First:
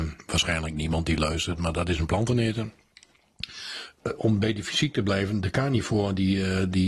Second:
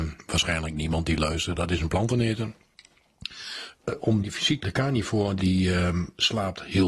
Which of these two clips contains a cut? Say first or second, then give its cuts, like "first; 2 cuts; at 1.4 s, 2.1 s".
second; 4 cuts; at 1.6 s, 4.2 s, 4.6 s, 5.4 s